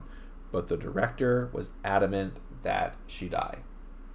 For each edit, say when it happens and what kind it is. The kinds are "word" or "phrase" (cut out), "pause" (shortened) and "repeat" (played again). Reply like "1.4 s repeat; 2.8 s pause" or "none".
none